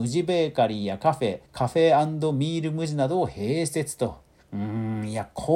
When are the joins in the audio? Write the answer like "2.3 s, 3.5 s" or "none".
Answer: 1.5 s, 4.4 s